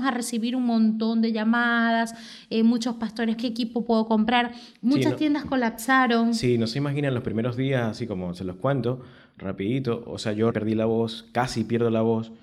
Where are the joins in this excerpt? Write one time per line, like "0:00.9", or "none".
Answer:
0:03.4
0:10.5